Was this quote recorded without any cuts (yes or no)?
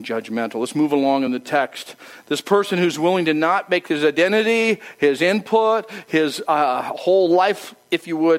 yes